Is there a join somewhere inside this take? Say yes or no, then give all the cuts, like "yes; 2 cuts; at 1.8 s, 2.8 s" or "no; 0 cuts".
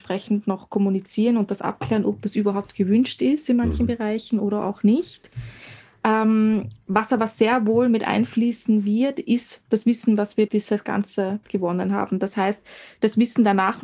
yes; 2 cuts; at 10.5 s, 11.4 s